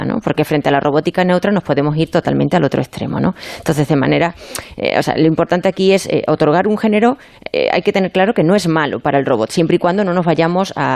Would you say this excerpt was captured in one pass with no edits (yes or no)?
yes